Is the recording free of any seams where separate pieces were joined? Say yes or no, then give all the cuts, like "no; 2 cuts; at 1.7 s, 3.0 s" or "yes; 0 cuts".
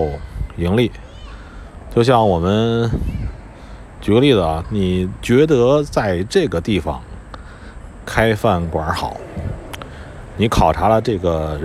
no; 1 cut; at 4.6 s